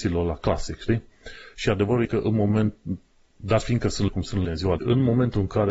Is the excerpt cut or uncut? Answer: cut